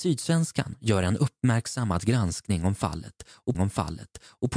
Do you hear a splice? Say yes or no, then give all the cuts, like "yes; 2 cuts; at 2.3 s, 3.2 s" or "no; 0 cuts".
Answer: yes; 1 cut; at 3.5 s